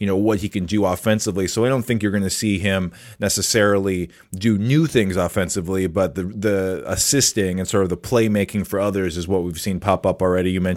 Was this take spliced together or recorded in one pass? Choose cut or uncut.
uncut